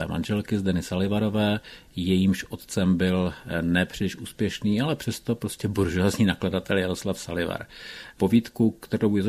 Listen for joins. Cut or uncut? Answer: uncut